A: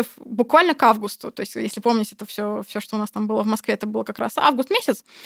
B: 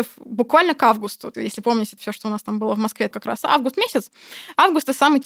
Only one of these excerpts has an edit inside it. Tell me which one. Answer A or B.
B